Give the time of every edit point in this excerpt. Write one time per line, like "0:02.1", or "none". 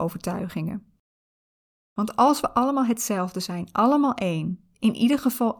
none